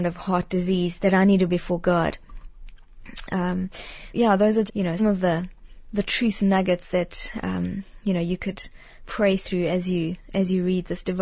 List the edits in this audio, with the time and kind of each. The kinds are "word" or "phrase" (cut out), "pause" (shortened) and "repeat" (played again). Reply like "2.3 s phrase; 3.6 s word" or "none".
1.0 s word; 1.5 s word; 4.1 s word; 4.7 s word; 5.0 s word